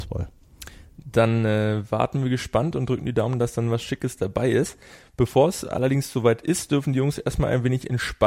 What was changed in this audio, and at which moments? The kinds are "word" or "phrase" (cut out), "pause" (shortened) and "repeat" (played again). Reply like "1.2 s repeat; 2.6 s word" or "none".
none